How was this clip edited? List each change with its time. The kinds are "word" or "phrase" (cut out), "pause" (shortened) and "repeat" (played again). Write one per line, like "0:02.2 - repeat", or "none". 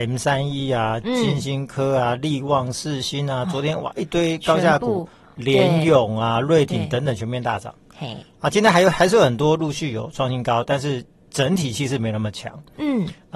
none